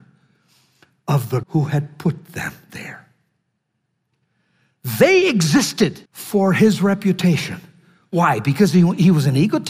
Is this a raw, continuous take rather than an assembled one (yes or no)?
no